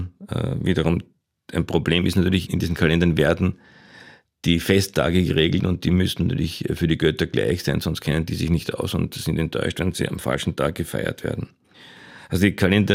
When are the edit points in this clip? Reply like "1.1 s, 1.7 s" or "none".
none